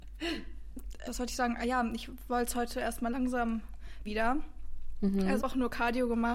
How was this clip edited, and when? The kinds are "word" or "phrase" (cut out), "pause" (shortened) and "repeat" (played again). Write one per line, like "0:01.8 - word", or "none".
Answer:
0:01.1 - word
0:04.1 - word
0:05.4 - phrase